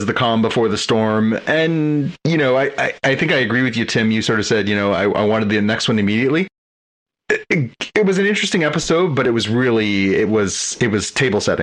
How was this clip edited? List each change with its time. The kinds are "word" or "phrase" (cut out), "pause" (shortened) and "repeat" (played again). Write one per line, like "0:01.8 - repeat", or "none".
none